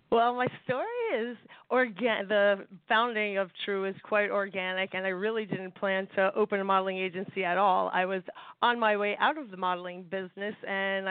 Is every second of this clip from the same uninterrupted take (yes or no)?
yes